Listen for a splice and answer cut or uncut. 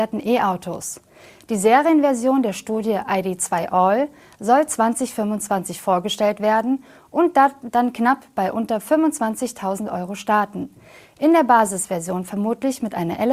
uncut